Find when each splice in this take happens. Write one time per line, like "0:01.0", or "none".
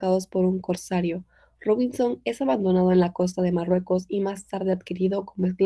none